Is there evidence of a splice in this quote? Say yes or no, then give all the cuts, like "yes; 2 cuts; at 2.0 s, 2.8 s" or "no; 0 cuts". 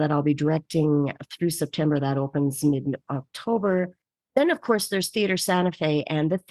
no; 0 cuts